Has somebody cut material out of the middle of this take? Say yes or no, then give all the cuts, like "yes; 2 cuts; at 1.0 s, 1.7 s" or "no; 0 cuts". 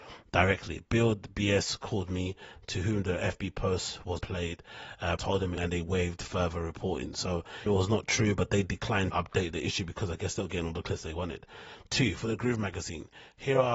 yes; 5 cuts; at 4.2 s, 5.2 s, 5.6 s, 7.7 s, 9.1 s